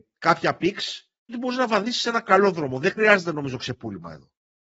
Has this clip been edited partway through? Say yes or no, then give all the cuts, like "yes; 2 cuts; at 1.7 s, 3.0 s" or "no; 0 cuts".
yes; 1 cut; at 1.3 s